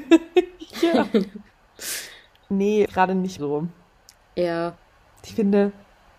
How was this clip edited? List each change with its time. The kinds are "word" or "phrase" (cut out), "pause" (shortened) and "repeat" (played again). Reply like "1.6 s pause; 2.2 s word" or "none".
2.9 s word; 3.4 s word